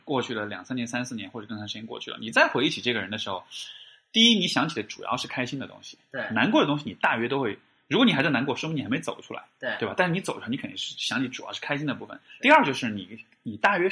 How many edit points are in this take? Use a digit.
0